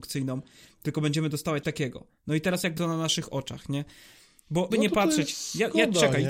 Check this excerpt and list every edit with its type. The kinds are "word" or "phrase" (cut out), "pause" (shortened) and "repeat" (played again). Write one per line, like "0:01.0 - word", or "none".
0:01.6 - word
0:02.8 - word
0:04.7 - word